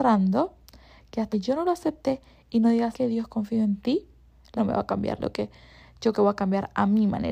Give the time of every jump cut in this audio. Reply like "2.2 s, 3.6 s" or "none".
1.3 s, 2.9 s, 4.6 s, 5.2 s, 6.1 s

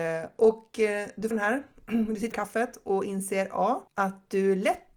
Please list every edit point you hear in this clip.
1.3 s, 2.3 s, 3.9 s

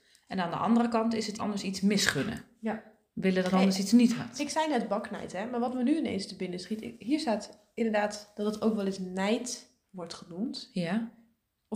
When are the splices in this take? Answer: 1.4 s, 3.5 s

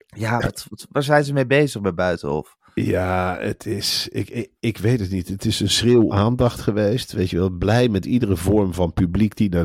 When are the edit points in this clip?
6.1 s

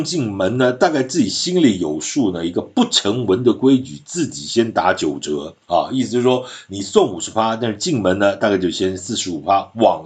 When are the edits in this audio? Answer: 5.6 s

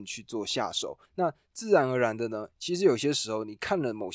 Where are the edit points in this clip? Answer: 1.1 s

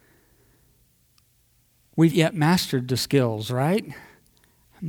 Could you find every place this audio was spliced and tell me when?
2.1 s

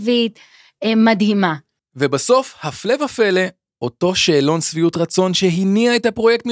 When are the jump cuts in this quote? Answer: none

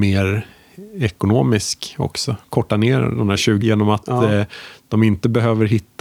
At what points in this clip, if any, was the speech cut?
3.6 s

